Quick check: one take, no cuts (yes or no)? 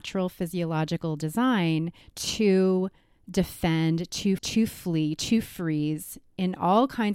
no